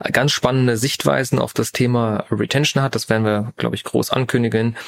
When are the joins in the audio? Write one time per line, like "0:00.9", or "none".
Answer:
none